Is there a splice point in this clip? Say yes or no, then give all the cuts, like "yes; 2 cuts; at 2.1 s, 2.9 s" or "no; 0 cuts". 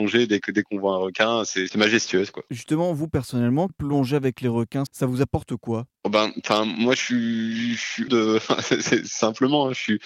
yes; 3 cuts; at 3.7 s, 4.9 s, 8.1 s